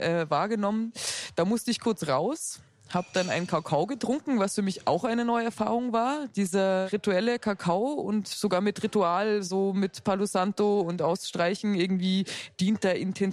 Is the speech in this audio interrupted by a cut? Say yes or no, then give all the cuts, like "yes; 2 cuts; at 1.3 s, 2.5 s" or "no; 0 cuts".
no; 0 cuts